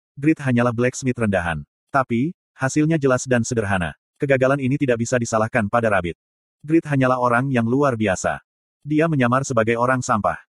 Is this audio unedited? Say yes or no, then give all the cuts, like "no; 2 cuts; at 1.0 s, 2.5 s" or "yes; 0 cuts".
yes; 0 cuts